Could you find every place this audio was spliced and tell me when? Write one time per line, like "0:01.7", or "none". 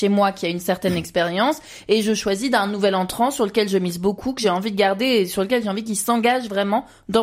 none